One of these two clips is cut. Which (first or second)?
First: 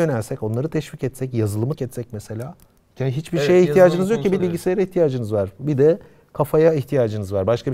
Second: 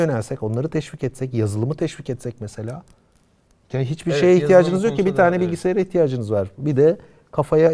first